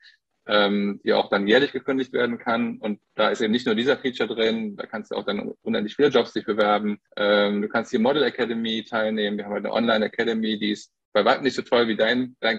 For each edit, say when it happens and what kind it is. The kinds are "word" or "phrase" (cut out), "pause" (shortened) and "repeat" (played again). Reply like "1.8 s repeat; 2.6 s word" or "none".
3.1 s pause; 7.1 s pause